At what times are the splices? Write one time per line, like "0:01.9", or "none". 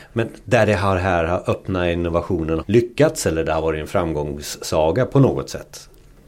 0:02.6